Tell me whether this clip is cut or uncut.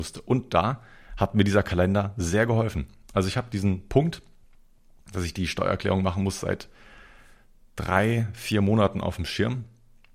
uncut